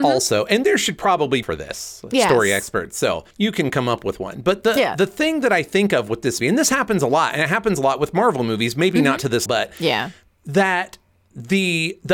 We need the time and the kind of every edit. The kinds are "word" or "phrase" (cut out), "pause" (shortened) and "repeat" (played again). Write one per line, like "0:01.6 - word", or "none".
0:01.4 - phrase
0:03.3 - pause
0:06.4 - word
0:09.5 - word